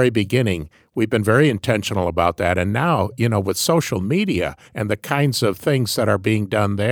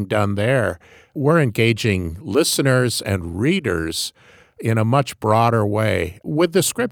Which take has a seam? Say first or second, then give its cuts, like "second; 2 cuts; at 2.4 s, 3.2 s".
first; 1 cut; at 4.7 s